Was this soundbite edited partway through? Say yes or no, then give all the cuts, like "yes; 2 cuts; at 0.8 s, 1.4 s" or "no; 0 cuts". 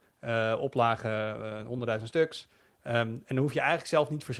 no; 0 cuts